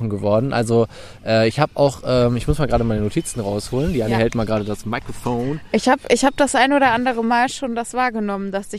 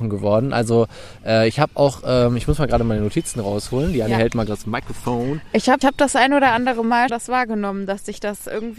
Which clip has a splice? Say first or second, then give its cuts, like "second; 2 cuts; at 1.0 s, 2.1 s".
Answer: second; 3 cuts; at 4.5 s, 5.8 s, 7.1 s